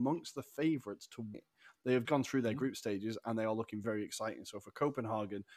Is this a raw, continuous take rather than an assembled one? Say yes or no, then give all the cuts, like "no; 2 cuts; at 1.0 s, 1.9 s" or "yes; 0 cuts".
no; 3 cuts; at 1.3 s, 2.0 s, 3.8 s